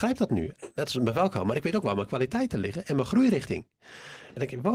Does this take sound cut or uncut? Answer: uncut